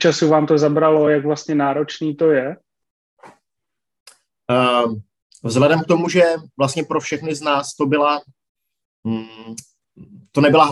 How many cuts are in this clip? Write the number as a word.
zero